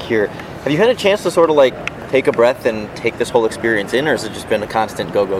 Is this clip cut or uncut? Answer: uncut